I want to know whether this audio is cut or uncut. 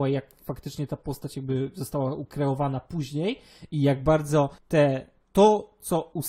cut